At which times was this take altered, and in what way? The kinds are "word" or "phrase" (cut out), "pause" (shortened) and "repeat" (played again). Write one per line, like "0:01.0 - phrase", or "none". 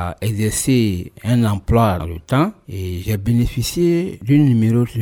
0:02.0 - word